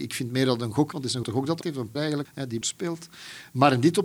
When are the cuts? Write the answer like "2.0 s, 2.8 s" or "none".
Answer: 0.9 s, 1.2 s, 1.6 s, 2.0 s, 2.3 s, 2.6 s